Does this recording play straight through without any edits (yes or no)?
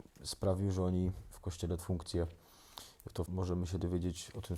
no